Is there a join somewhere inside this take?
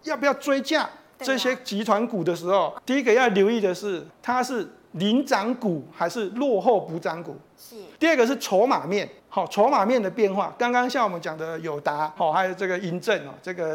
yes; 5 cuts; at 2.8 s, 4.1 s, 8.0 s, 9.2 s, 12.2 s

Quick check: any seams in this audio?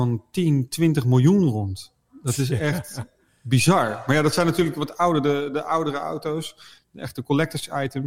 no; 0 cuts

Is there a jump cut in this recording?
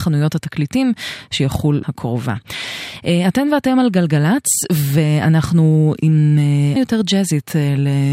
yes; 2 cuts; at 1.8 s, 6.8 s

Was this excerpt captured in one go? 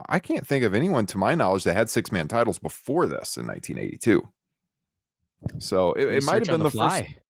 yes; 0 cuts

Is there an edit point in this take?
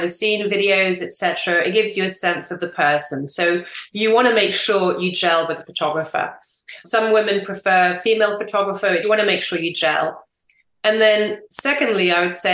yes; 1 cut; at 9.0 s

